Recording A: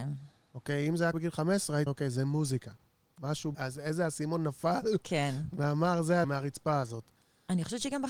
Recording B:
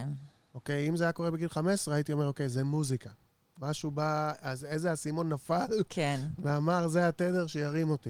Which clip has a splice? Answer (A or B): A